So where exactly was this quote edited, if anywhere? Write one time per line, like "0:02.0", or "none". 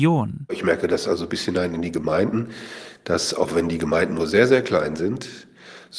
none